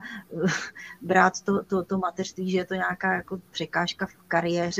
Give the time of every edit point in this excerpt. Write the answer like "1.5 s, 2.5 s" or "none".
none